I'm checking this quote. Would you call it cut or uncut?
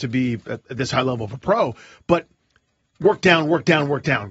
uncut